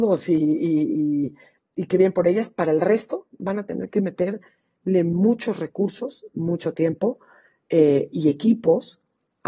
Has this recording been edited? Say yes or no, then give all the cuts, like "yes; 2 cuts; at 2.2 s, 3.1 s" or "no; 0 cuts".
no; 0 cuts